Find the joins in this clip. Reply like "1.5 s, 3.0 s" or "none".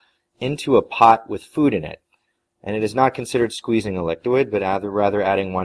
none